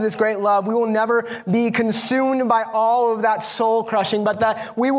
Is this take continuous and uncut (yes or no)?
yes